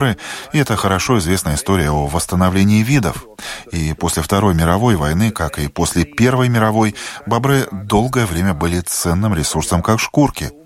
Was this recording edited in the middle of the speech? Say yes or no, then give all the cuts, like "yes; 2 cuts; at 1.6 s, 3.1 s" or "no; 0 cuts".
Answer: no; 0 cuts